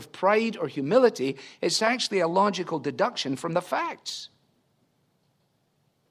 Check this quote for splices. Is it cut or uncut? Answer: uncut